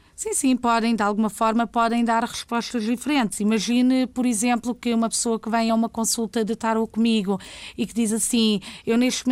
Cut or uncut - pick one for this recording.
uncut